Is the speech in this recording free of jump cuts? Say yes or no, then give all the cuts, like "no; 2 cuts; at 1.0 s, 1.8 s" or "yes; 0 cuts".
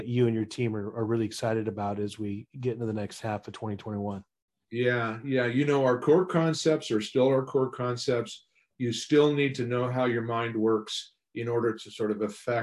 yes; 0 cuts